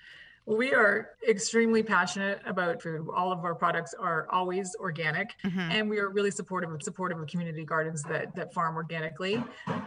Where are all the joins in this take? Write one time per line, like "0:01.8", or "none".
0:01.1
0:02.8
0:05.4
0:06.8
0:08.3

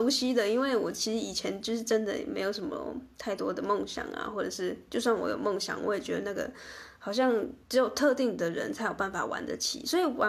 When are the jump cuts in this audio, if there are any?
0:07.6

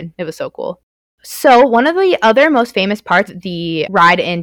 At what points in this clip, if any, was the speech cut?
0:03.3

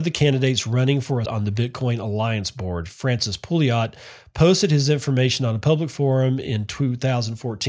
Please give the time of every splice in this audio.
0:01.2

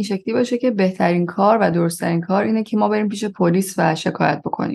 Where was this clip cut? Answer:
none

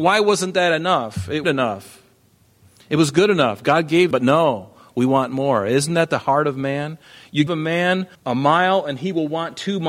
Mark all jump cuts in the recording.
0:01.4
0:04.1
0:07.5
0:08.1

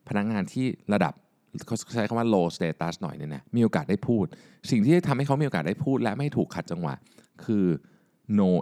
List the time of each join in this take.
none

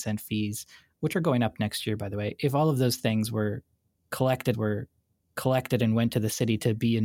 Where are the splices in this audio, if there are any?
0:04.5

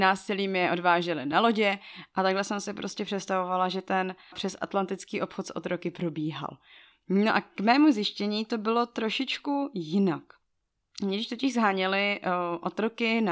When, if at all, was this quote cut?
none

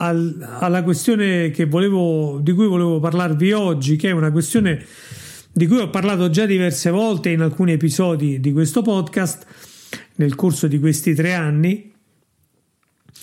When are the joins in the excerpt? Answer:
none

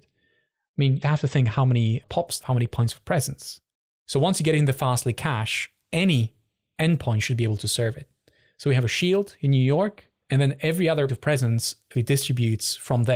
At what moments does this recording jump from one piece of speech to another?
0:01.0
0:02.4
0:11.1
0:11.9

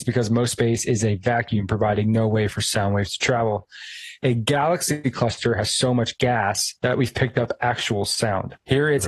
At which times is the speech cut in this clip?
0:06.8

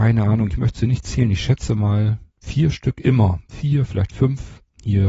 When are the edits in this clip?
0:02.3

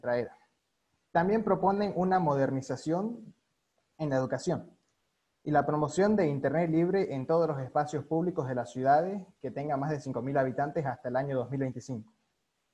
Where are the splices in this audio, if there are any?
none

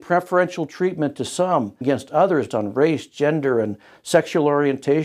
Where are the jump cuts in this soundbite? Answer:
0:01.8
0:02.5

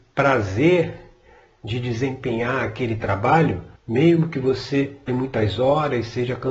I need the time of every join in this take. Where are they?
0:03.8
0:05.1

